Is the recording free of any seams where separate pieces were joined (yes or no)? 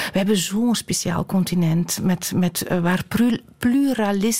yes